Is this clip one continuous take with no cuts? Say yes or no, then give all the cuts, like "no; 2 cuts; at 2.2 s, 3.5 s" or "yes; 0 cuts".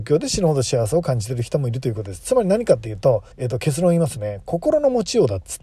no; 1 cut; at 3.3 s